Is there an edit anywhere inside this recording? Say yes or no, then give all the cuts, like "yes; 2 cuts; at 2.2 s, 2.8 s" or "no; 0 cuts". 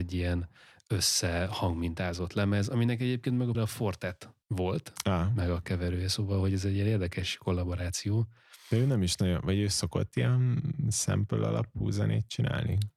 yes; 2 cuts; at 3.5 s, 4.4 s